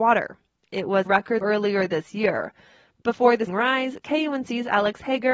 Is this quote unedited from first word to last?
no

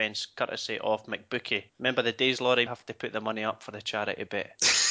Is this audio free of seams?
no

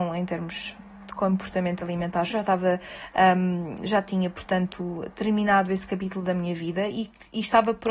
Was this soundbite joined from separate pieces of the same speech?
yes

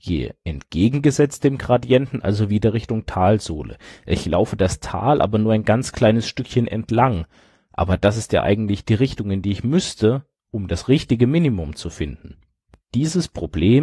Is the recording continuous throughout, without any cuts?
yes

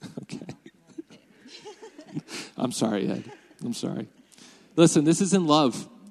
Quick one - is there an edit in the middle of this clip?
no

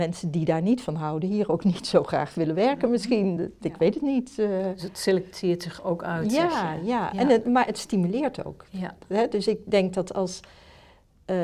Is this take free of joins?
no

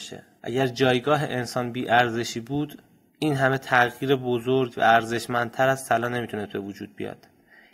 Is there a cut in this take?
no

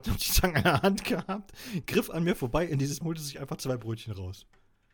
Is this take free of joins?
no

